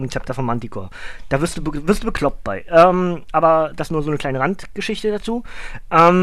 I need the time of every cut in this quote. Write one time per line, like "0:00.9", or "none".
none

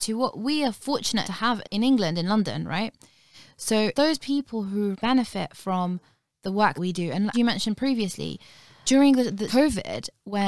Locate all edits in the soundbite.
0:01.2
0:01.6
0:03.9
0:04.9
0:06.8
0:07.3
0:08.8
0:09.5

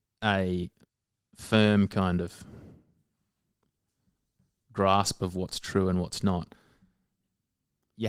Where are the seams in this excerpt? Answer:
none

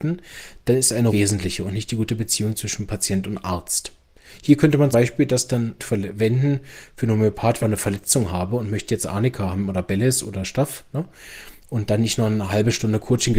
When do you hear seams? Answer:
0:01.1
0:04.9
0:05.8
0:07.6

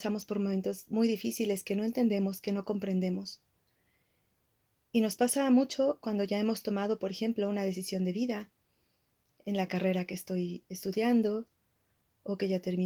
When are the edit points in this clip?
none

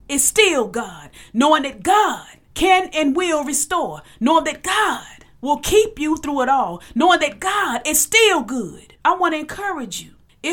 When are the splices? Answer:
0:02.5
0:05.3
0:09.0

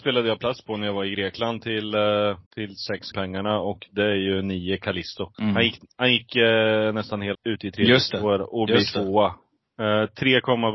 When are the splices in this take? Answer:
0:02.5
0:03.1
0:05.3
0:07.3

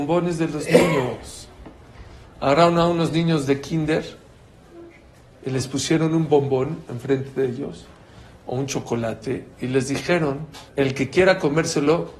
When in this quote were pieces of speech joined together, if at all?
0:10.7

